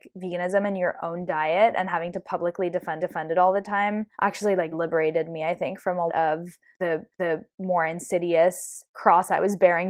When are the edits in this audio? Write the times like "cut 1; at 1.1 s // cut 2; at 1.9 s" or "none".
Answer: cut 1; at 3.0 s // cut 2; at 4.1 s // cut 3; at 4.7 s // cut 4; at 6.1 s // cut 5; at 7.1 s